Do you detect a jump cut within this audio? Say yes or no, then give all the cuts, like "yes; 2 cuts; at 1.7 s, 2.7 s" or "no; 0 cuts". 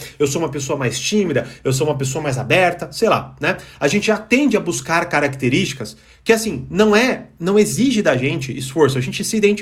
no; 0 cuts